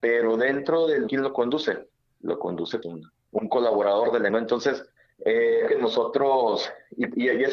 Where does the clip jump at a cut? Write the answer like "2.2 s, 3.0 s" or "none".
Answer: 1.1 s, 2.8 s, 3.3 s, 4.3 s, 5.7 s